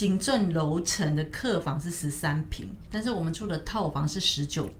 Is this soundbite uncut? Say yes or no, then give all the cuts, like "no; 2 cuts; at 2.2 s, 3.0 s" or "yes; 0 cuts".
no; 1 cut; at 2.9 s